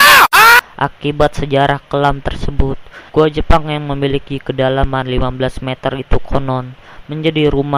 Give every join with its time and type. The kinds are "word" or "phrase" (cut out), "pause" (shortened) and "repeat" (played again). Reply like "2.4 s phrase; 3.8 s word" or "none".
3.1 s pause